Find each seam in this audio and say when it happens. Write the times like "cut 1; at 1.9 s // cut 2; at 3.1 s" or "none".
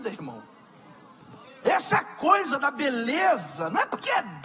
cut 1; at 1.4 s